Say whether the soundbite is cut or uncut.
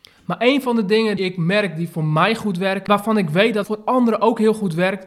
cut